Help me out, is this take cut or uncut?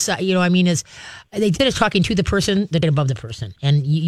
cut